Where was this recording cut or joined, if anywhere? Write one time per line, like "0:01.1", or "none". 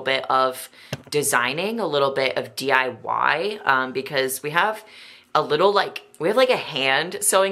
none